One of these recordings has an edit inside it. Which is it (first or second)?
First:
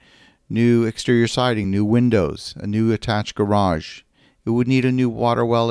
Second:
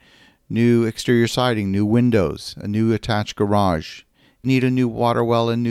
second